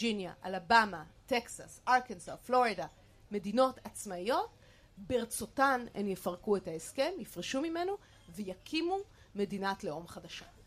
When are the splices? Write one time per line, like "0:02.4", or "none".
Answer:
none

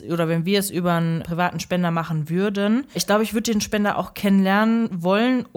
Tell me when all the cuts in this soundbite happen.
0:01.2
0:02.9

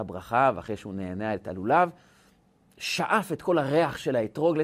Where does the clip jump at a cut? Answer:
none

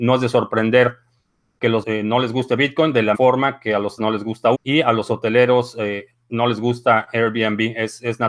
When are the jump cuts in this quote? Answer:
0:01.8
0:03.1
0:04.0
0:04.5

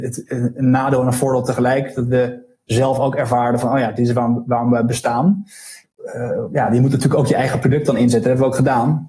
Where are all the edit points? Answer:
none

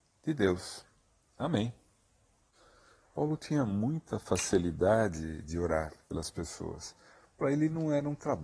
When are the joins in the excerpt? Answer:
none

